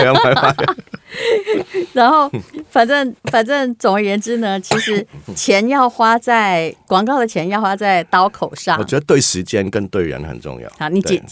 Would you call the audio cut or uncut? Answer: cut